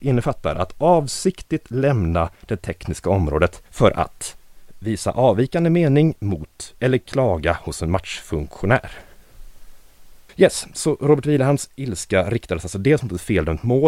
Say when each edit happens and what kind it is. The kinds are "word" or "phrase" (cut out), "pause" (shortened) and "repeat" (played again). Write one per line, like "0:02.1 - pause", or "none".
0:02.4 - pause
0:03.7 - pause
0:10.3 - pause